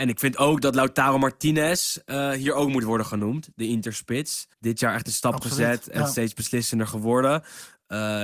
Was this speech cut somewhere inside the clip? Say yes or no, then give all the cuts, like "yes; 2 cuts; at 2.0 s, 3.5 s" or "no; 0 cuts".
yes; 1 cut; at 4.5 s